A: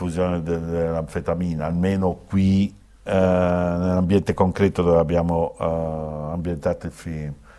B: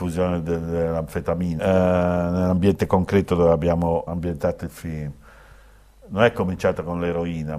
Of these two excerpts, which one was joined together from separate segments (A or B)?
B